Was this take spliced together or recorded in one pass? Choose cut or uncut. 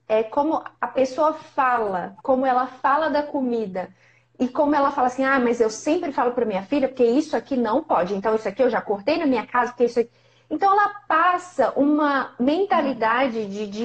uncut